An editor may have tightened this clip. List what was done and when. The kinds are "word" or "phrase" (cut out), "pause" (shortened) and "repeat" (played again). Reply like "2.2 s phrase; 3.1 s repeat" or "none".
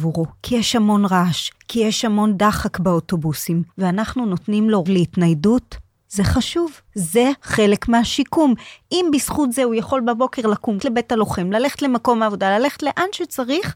3.7 s pause; 4.9 s word; 6.9 s pause; 10.8 s word